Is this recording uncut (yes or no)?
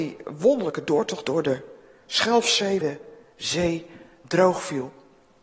no